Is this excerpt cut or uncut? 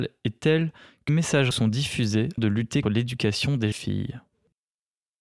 cut